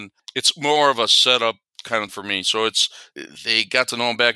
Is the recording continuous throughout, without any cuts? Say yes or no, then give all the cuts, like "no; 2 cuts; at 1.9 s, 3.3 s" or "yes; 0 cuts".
no; 1 cut; at 2.1 s